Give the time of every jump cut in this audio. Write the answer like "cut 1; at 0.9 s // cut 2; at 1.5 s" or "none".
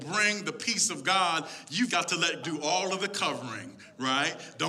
cut 1; at 1.9 s // cut 2; at 2.4 s